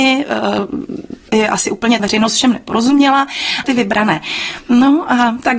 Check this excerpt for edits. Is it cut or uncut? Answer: cut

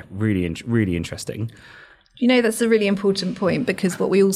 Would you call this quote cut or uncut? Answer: uncut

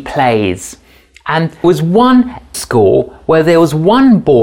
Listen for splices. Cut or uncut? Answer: cut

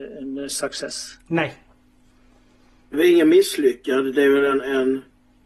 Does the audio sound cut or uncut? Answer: cut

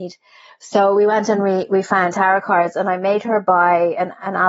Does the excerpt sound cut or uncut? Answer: uncut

